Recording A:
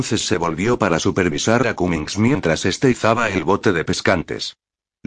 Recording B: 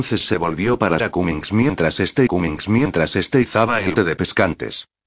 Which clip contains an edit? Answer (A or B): B